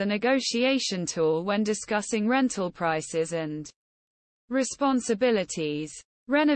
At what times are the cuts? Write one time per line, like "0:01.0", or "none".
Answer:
none

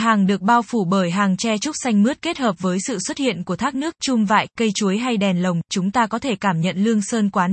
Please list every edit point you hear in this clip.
none

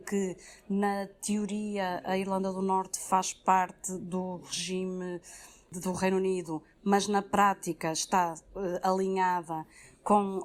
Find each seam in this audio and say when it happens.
none

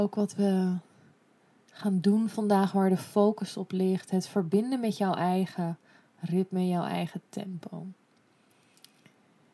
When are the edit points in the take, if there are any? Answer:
none

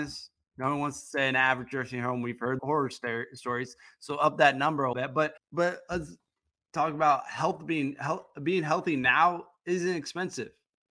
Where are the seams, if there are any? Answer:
0:02.6
0:04.9
0:05.4

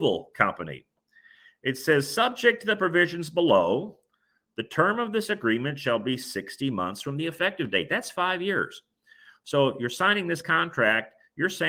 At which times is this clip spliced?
none

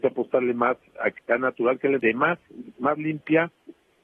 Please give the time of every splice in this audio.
0:01.2
0:02.0

